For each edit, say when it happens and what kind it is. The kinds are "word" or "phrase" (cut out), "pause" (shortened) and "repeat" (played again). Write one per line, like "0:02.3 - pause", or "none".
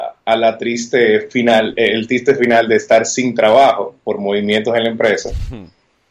none